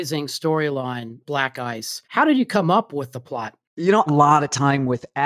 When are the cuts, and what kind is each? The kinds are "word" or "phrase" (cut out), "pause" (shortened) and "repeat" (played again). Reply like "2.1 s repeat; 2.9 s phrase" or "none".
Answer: 1.2 s word; 2.0 s pause; 3.6 s pause; 4.1 s phrase